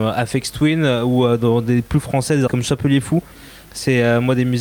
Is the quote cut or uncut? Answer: cut